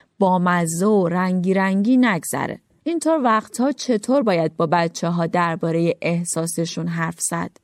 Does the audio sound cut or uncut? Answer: uncut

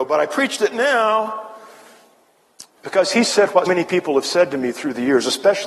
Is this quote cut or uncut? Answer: cut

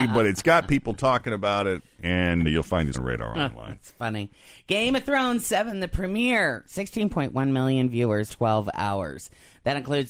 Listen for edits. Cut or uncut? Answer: cut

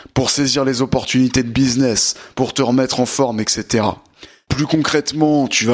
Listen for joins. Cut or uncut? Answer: uncut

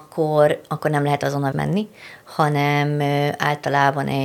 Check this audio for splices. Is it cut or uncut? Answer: cut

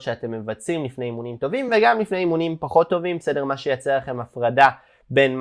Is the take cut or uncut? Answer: uncut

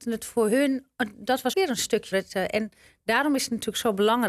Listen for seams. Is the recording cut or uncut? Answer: cut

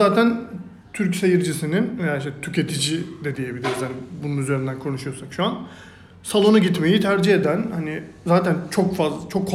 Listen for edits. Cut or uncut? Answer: uncut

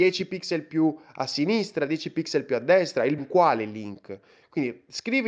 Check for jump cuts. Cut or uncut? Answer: cut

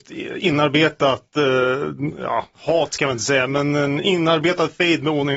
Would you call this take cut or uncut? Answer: uncut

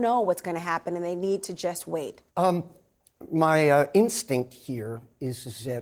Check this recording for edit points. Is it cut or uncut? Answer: cut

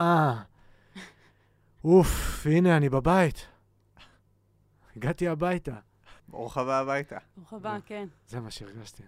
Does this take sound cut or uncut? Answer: cut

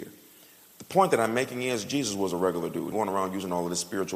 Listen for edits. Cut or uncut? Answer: cut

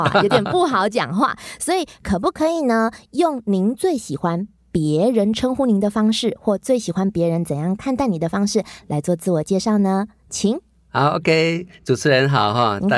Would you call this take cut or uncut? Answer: uncut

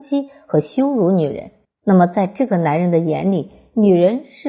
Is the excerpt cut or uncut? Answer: cut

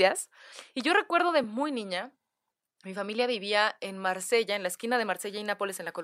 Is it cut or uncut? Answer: uncut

